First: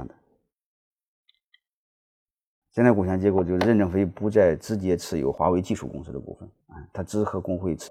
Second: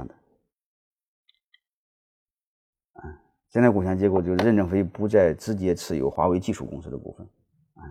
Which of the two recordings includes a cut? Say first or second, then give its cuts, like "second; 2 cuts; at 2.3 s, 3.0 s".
first; 2 cuts; at 2.6 s, 6.6 s